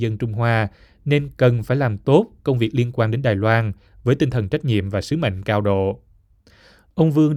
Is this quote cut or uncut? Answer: uncut